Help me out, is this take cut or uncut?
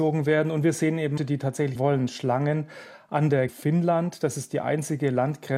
cut